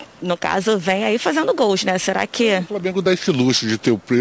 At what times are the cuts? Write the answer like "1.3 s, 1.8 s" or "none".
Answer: none